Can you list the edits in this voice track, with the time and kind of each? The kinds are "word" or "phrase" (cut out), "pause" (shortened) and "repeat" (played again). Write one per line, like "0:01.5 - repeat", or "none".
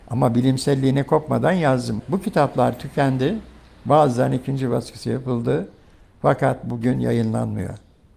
none

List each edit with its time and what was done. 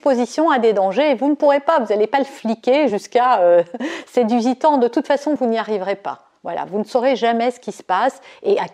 none

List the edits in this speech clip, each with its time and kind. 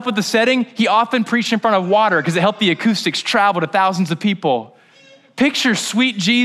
none

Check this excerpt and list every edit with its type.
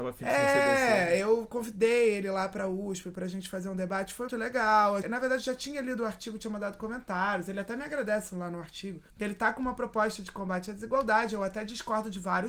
0:04.3 - word
0:05.0 - word
0:09.1 - pause

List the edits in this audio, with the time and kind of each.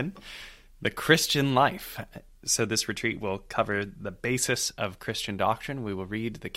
none

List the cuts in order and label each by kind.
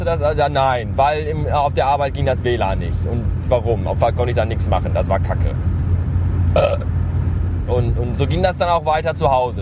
0:03.4 - phrase
0:04.0 - word

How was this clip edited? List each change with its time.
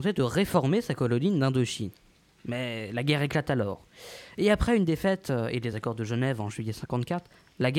none

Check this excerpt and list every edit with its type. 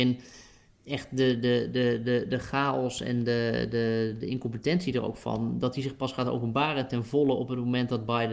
none

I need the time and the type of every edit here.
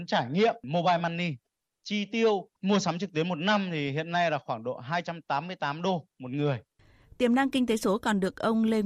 none

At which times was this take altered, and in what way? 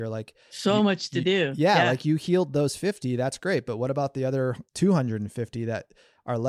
0:04.7 - pause

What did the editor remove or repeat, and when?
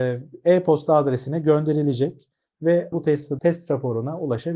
0:02.9 - phrase
0:03.4 - word

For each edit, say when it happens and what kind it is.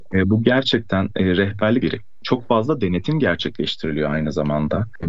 0:01.8 - phrase

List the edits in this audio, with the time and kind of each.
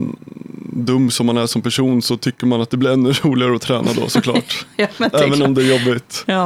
none

